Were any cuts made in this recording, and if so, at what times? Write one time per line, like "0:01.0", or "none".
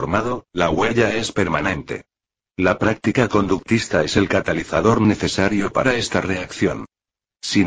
none